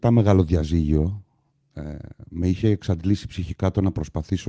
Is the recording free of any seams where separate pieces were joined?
yes; 0 cuts

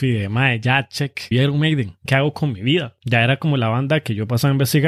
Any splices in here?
yes; 2 cuts; at 1.3 s, 2.1 s

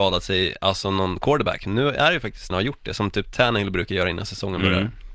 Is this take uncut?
no; 1 cut; at 2.5 s

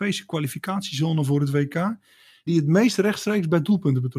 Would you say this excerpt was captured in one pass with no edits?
yes; 0 cuts

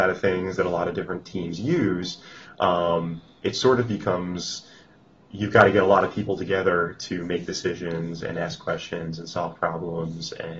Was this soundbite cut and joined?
no; 0 cuts

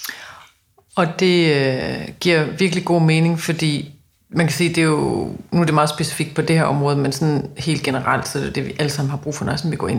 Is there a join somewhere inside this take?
no; 0 cuts

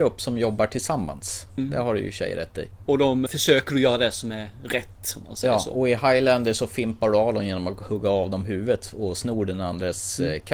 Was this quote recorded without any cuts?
no; 1 cut; at 3.3 s

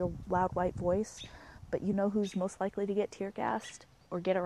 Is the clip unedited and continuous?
yes; 0 cuts

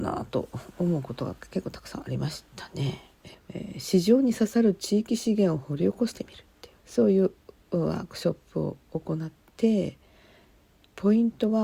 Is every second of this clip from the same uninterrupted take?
no; 1 cut; at 6.8 s

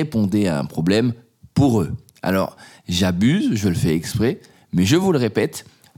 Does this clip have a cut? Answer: no; 0 cuts

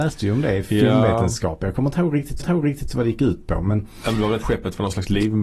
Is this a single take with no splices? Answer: no; 2 cuts; at 2.4 s, 4.4 s

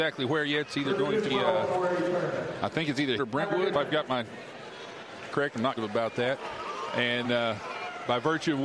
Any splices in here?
yes; 6 cuts; at 1.3 s, 3.2 s, 3.7 s, 5.3 s, 5.8 s, 7.2 s

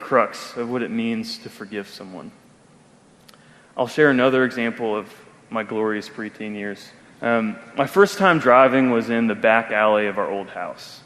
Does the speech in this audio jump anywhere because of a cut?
yes; 1 cut; at 7.0 s

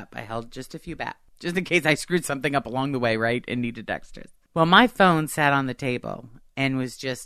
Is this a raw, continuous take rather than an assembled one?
yes; 0 cuts

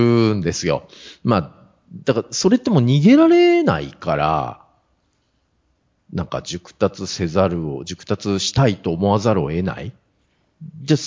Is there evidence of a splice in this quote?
no; 0 cuts

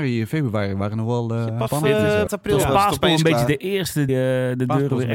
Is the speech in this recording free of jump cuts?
no; 3 cuts; at 1.7 s, 2.3 s, 4.1 s

